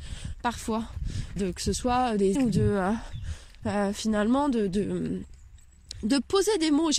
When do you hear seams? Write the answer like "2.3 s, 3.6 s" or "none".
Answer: 1.4 s, 2.3 s